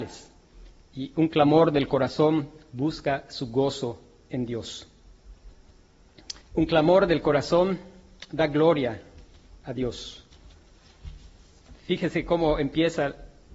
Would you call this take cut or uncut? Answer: cut